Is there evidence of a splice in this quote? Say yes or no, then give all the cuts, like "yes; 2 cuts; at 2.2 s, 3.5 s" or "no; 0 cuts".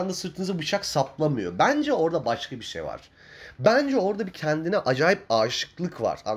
no; 0 cuts